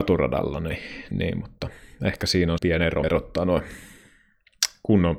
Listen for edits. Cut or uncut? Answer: cut